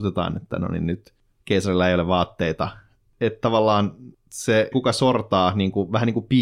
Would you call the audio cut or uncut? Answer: cut